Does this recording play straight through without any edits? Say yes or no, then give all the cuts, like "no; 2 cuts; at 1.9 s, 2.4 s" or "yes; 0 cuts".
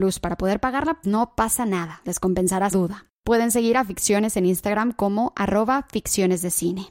no; 2 cuts; at 1.0 s, 2.7 s